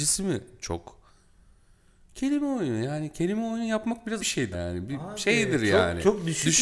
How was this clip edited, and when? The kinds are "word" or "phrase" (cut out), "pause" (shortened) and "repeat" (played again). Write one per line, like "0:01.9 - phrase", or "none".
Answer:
0:04.2 - word
0:04.5 - word